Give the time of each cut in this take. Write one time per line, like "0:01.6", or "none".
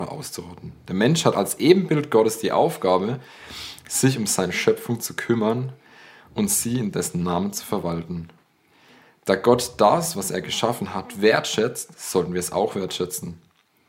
none